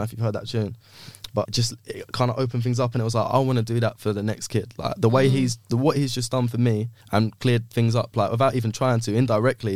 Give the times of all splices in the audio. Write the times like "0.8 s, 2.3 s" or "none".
1.4 s, 7.0 s